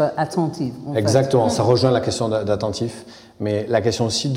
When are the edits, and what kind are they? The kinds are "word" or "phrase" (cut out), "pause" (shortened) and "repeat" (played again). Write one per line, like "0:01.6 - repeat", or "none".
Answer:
none

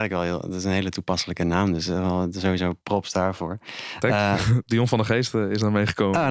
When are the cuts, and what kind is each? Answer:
0:02.8 - pause

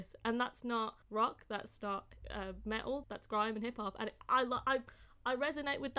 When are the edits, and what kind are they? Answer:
0:01.0 - pause
0:02.2 - word
0:03.0 - word

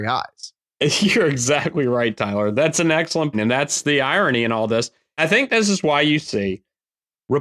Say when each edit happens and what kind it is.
0:03.3 - word
0:05.2 - word

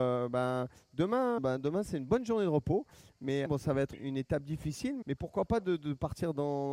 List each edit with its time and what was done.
0:01.4 - word
0:03.5 - word
0:03.9 - word
0:05.0 - word

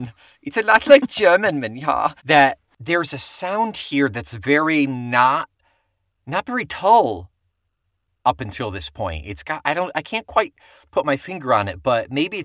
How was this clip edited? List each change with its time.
0:02.2 - pause

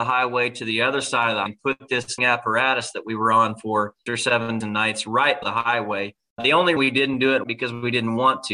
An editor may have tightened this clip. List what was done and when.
0:01.5 - word
0:02.2 - word
0:04.1 - word
0:04.6 - word
0:05.4 - word
0:06.4 - word
0:06.8 - word
0:07.4 - word

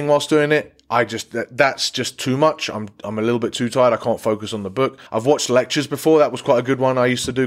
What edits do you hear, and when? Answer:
0:05.1 - pause

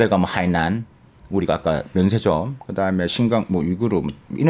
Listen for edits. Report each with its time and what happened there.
none

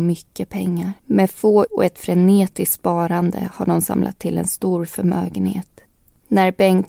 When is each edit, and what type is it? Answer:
0:01.0 - pause
0:01.7 - word
0:04.2 - word

